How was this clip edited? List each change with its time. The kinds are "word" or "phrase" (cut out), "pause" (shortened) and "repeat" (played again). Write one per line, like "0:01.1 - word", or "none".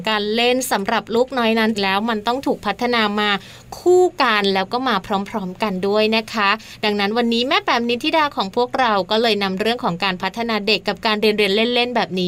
0:01.7 - phrase

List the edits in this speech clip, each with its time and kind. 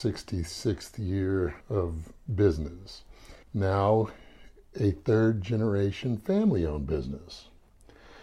0:01.6 - pause
0:03.4 - pause

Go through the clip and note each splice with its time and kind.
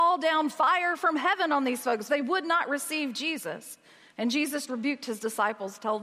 0:02.1 - word
0:04.7 - word

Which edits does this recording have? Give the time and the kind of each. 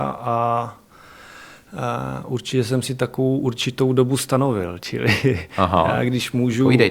none

